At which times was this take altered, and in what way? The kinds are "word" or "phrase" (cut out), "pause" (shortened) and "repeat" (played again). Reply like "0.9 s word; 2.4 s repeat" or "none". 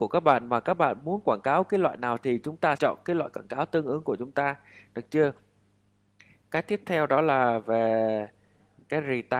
2.8 s word

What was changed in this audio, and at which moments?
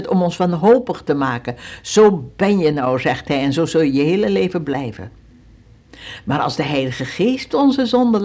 none

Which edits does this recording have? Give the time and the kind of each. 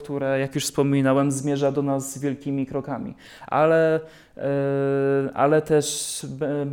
none

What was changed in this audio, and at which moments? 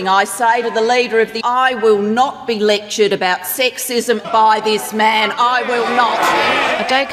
1.4 s word; 4.2 s phrase

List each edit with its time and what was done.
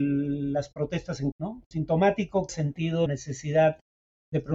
1.3 s word; 2.5 s word; 3.1 s word

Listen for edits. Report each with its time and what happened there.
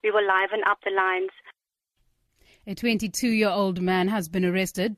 none

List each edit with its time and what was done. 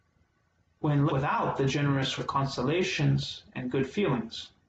1.1 s word; 2.2 s word

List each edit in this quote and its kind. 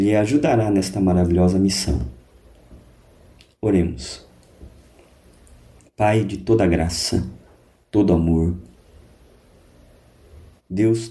none

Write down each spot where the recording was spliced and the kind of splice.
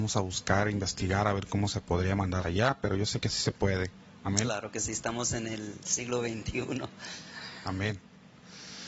2.4 s word

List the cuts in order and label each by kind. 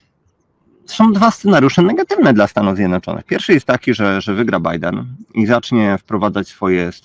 none

